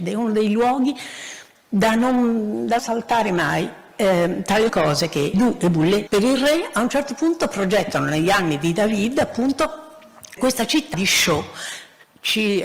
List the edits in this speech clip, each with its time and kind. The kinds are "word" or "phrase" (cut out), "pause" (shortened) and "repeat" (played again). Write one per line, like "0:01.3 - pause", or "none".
0:02.8 - word
0:04.7 - word
0:05.3 - word
0:06.1 - word
0:10.4 - word
0:10.9 - word